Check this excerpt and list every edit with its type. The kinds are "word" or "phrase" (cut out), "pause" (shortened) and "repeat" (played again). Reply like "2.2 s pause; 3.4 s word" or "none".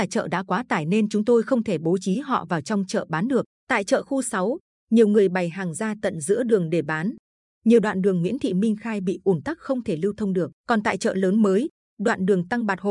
3.6 s pause; 10.6 s pause